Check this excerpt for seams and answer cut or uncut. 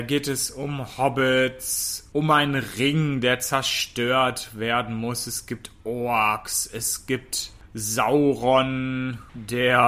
uncut